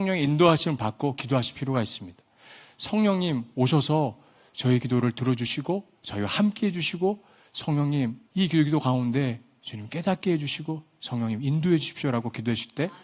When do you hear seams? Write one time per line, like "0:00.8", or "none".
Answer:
0:08.3